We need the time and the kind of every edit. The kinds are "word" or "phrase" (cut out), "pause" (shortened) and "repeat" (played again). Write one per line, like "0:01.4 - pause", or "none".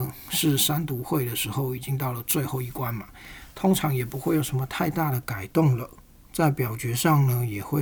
none